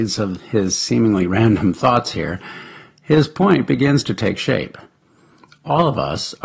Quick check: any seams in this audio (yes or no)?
no